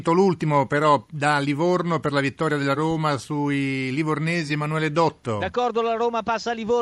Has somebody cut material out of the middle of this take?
no; 0 cuts

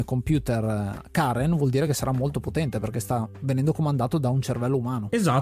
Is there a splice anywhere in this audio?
no; 0 cuts

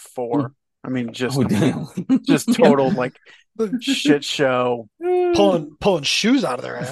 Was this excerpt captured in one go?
yes; 0 cuts

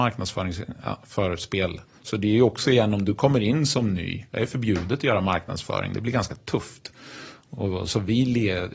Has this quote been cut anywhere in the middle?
yes; 2 cuts; at 1.9 s, 4.3 s

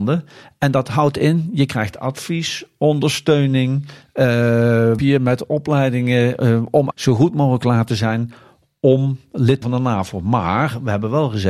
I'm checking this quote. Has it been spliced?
yes; 3 cuts; at 5.0 s, 6.9 s, 9.6 s

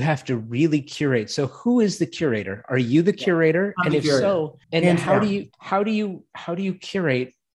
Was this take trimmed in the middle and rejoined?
yes; 2 cuts; at 4.6 s, 5.5 s

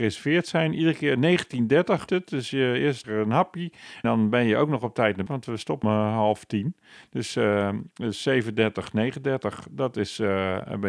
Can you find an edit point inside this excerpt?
yes; 5 cuts; at 2.1 s, 3.0 s, 4.0 s, 5.3 s, 5.8 s

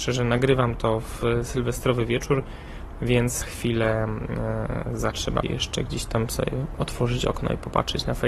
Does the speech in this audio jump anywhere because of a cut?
yes; 3 cuts; at 3.4 s, 5.1 s, 5.4 s

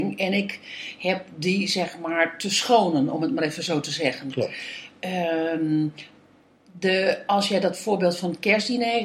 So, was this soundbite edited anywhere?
no; 0 cuts

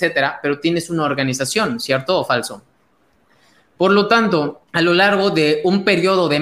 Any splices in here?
yes; 1 cut; at 4.7 s

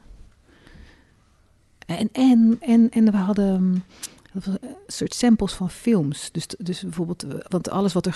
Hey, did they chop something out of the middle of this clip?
yes; 1 cut; at 2.6 s

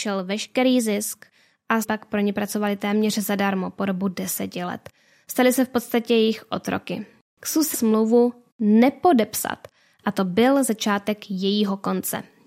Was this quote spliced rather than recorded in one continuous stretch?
yes; 2 cuts; at 1.8 s, 7.7 s

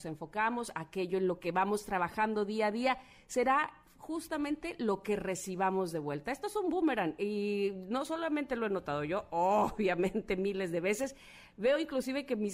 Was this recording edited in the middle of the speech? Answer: no; 0 cuts

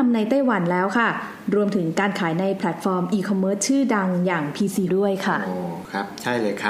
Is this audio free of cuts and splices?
no; 1 cut; at 4.9 s

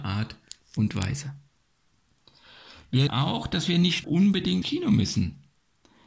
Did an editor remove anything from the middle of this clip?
yes; 3 cuts; at 3.1 s, 4.0 s, 4.6 s

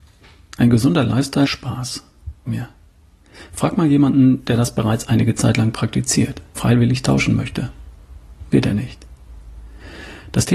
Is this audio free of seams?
no; 3 cuts; at 1.4 s, 2.5 s, 6.6 s

